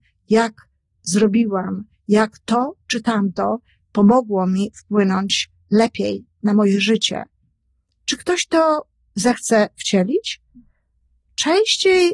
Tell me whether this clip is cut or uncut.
uncut